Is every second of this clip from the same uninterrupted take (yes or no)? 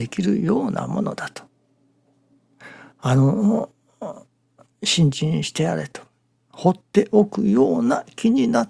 yes